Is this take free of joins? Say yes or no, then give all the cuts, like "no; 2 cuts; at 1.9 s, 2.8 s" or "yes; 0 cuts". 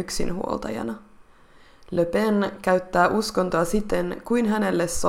yes; 0 cuts